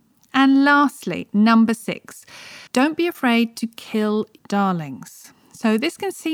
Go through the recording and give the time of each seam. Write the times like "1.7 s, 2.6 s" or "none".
2.7 s, 4.4 s, 5.4 s